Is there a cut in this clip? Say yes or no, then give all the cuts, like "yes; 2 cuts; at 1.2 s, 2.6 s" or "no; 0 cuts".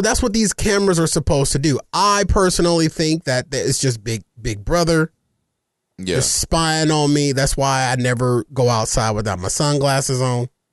no; 0 cuts